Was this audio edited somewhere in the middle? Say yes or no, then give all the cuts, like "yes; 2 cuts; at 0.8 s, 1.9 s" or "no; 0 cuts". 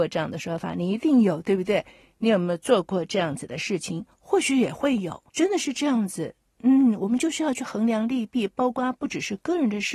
yes; 1 cut; at 5.3 s